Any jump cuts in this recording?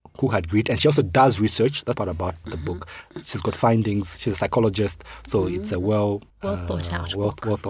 yes; 3 cuts; at 2.0 s, 2.4 s, 6.3 s

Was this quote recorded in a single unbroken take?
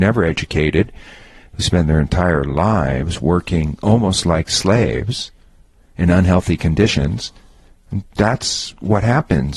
yes; 0 cuts

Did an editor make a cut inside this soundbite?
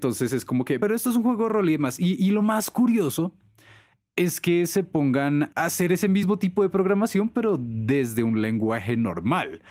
no; 0 cuts

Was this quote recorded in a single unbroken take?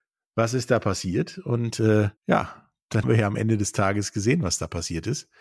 no; 2 cuts; at 2.2 s, 3.0 s

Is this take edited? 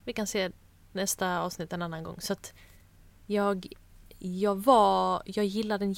no; 0 cuts

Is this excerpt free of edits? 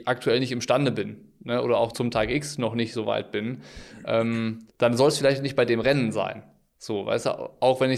no; 2 cuts; at 1.9 s, 4.7 s

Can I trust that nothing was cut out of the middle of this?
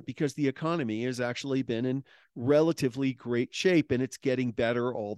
yes; 0 cuts

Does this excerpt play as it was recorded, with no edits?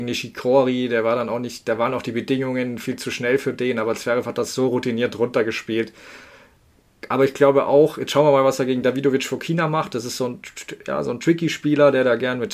yes; 0 cuts

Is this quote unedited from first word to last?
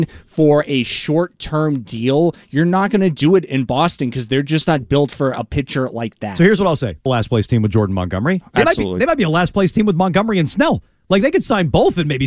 no; 1 cut; at 7.1 s

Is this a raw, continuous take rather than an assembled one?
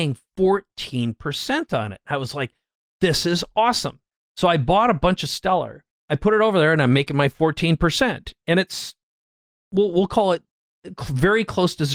no; 1 cut; at 6.0 s

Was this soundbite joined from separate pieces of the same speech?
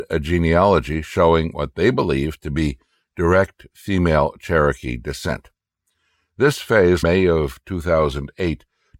yes; 1 cut; at 7.0 s

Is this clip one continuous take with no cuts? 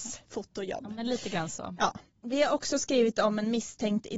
yes; 0 cuts

